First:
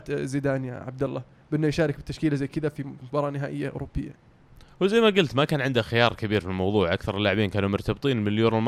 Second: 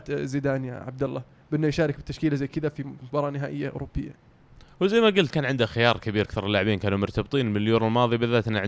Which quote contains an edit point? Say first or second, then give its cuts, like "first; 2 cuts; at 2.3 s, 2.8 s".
second; 2 cuts; at 5.3 s, 6.2 s